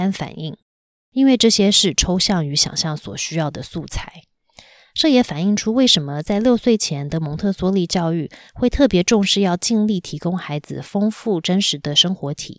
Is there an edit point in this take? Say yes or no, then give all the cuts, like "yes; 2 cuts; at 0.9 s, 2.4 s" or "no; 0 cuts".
no; 0 cuts